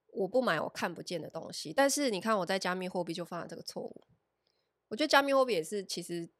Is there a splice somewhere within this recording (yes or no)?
no